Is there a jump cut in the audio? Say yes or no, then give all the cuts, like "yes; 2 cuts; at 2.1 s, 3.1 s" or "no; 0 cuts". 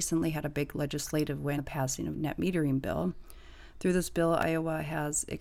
yes; 2 cuts; at 1.6 s, 2.1 s